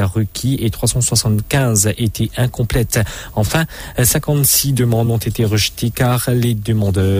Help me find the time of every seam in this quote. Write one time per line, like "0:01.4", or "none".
none